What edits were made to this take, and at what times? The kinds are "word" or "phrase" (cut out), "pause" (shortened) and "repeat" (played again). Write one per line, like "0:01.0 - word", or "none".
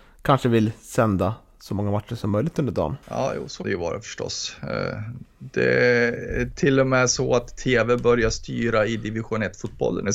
0:03.0 - pause
0:03.6 - word